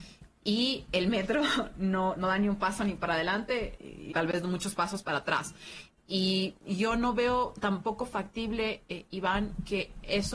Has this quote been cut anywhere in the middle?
yes; 3 cuts; at 2.2 s, 3.8 s, 4.1 s

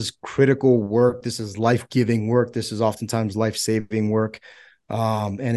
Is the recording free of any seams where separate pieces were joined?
yes; 0 cuts

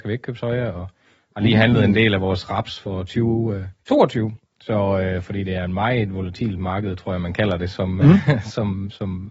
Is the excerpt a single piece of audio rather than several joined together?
no; 1 cut; at 3.8 s

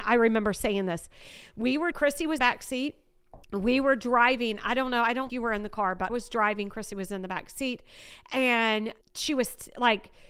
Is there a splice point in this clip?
yes; 6 cuts; at 1.9 s, 2.4 s, 3.4 s, 5.3 s, 6.1 s, 9.0 s

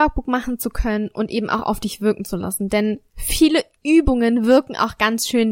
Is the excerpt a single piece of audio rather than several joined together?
yes; 0 cuts

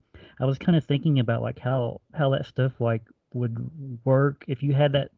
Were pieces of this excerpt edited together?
no; 0 cuts

